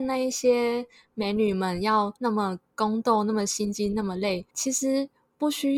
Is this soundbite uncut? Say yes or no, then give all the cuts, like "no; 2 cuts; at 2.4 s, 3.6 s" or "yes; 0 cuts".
no; 2 cuts; at 2.2 s, 4.5 s